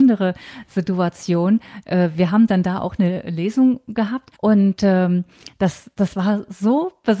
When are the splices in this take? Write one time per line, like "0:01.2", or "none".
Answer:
0:04.3